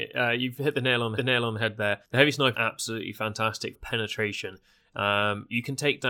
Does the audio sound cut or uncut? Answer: cut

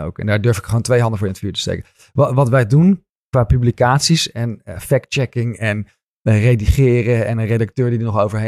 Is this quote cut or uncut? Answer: uncut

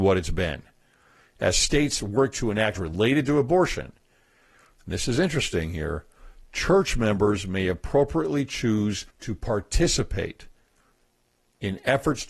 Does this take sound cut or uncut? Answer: cut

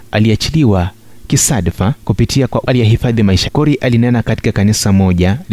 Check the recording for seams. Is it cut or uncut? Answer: cut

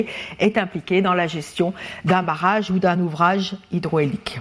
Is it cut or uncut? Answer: uncut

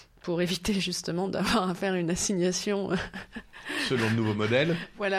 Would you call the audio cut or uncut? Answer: uncut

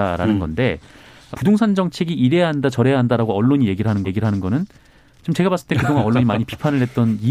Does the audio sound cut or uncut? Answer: cut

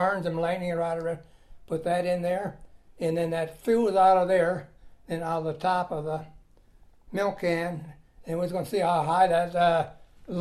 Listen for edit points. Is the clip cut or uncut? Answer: uncut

